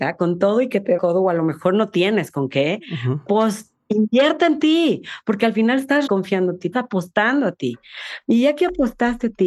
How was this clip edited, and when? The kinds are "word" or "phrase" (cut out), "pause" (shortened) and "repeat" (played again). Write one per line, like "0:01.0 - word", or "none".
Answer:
0:01.0 - word
0:06.1 - word
0:06.7 - word